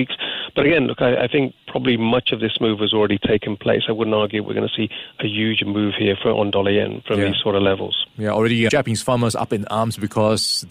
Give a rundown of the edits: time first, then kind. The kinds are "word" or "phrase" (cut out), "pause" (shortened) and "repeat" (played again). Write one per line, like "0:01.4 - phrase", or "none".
0:08.7 - word